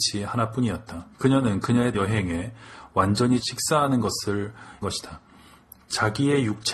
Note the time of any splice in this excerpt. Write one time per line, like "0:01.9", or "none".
0:01.1
0:01.9
0:03.4
0:04.8

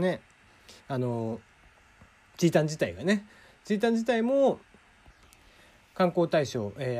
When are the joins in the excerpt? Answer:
none

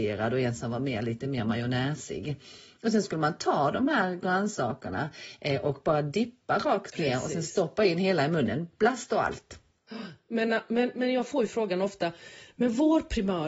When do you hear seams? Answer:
none

